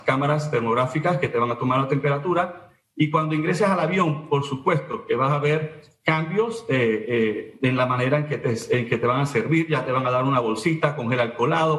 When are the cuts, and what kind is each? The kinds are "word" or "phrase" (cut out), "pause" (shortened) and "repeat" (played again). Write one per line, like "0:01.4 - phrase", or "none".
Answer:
none